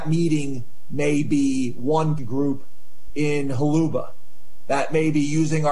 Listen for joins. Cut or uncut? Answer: cut